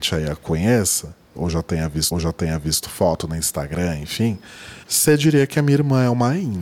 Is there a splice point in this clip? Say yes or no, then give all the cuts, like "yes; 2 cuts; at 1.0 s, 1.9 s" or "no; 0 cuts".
yes; 2 cuts; at 2.1 s, 4.8 s